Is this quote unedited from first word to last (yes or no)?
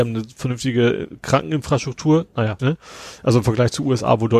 no